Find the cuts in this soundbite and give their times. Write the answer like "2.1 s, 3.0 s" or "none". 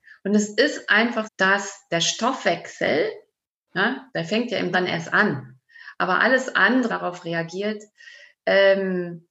1.2 s, 4.1 s, 4.7 s, 6.9 s